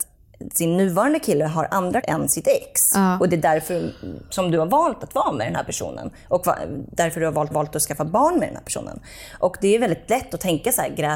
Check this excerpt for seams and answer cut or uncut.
cut